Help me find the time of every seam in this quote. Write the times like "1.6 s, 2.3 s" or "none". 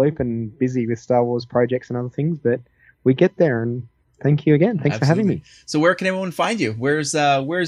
none